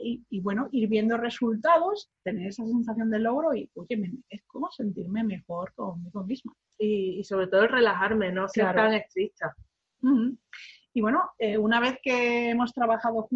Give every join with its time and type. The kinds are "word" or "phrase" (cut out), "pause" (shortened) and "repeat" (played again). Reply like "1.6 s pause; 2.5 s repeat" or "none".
none